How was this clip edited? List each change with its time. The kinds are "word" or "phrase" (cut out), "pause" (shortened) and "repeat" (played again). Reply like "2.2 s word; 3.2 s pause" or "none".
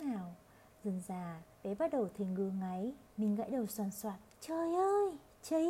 1.5 s pause; 3.1 s pause; 4.3 s pause